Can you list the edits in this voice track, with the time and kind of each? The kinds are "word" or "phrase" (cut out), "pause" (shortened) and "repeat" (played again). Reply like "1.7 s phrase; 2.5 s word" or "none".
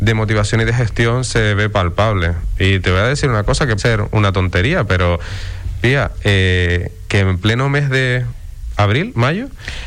3.8 s word